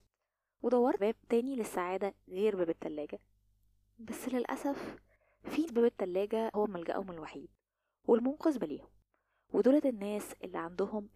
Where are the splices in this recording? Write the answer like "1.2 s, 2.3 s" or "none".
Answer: 1.0 s, 5.7 s, 6.5 s, 8.6 s